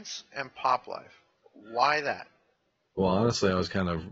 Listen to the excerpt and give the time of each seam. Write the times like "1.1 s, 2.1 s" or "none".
none